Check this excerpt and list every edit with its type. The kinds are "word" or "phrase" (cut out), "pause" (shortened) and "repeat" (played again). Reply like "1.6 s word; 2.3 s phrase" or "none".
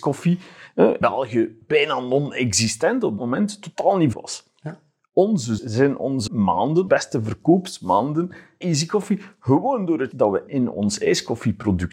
1.0 s word; 3.2 s word; 4.1 s word; 5.6 s word; 6.3 s word; 6.9 s word; 8.6 s word; 10.1 s word; 10.5 s word